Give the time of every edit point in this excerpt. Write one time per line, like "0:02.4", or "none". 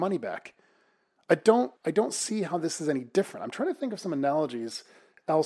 0:01.8